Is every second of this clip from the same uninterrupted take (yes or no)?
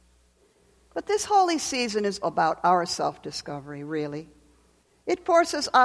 no